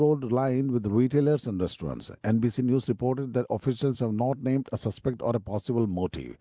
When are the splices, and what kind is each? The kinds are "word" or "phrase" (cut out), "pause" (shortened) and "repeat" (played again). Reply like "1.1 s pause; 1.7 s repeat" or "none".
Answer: none